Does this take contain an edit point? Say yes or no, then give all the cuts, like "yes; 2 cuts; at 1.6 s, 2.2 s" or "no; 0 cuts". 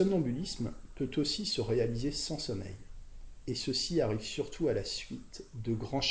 no; 0 cuts